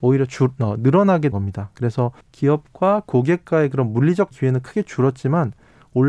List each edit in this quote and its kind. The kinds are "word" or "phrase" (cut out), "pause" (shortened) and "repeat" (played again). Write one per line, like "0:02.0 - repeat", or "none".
0:01.3 - word
0:02.2 - pause
0:04.3 - word